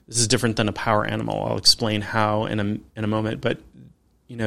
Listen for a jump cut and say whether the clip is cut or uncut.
uncut